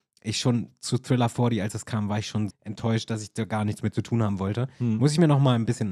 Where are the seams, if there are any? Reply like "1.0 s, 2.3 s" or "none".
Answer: 2.5 s